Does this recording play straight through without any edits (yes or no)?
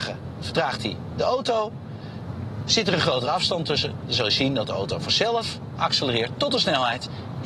yes